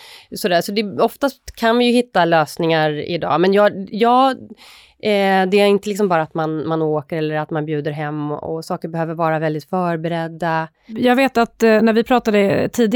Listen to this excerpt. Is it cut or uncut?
uncut